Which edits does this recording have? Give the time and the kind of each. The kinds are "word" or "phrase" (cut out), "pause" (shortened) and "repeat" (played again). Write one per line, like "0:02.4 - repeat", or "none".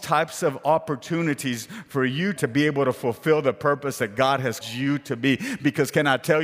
0:02.4 - phrase
0:04.6 - word